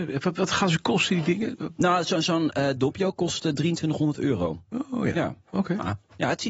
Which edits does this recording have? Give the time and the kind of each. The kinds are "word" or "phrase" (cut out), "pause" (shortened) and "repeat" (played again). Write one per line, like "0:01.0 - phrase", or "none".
0:05.4 - pause